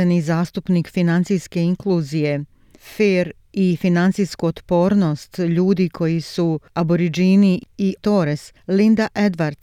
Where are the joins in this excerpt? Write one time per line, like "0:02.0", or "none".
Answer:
0:08.0